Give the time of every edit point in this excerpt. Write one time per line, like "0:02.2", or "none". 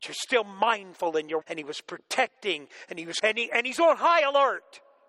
0:01.4
0:03.2

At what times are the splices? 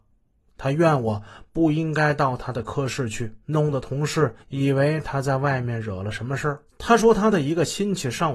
0:03.4
0:04.4
0:06.7

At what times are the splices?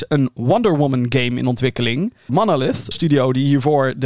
0:02.3
0:02.9

